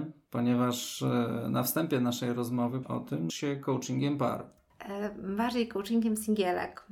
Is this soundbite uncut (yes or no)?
no